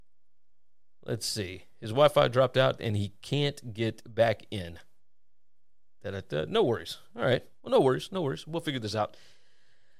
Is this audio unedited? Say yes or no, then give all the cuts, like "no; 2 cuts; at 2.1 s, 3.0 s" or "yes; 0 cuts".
yes; 0 cuts